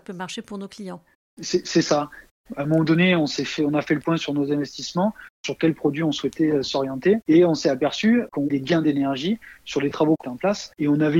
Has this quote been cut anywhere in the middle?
yes; 2 cuts; at 8.5 s, 10.2 s

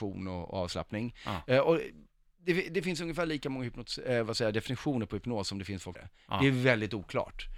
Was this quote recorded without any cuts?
no; 1 cut; at 5.9 s

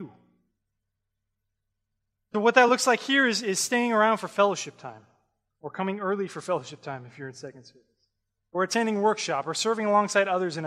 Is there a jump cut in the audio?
no; 0 cuts

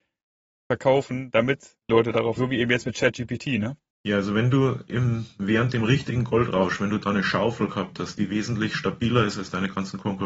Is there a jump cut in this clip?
yes; 3 cuts; at 1.8 s, 2.4 s, 3.9 s

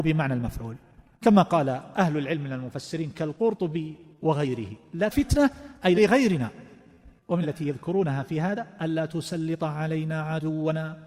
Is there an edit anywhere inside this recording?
yes; 3 cuts; at 5.1 s, 6.0 s, 7.4 s

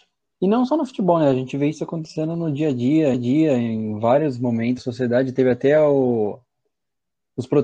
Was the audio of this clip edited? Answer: yes; 2 cuts; at 3.1 s, 4.8 s

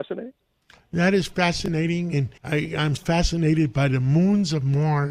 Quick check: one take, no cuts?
no; 2 cuts; at 2.4 s, 3.0 s

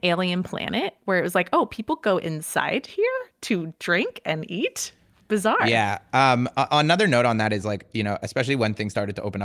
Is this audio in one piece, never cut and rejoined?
yes; 0 cuts

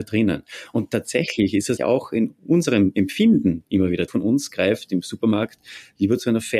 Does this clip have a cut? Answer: yes; 2 cuts; at 1.8 s, 4.1 s

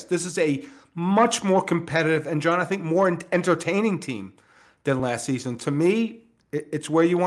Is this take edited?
no; 0 cuts

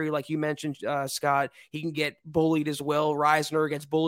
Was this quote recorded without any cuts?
yes; 0 cuts

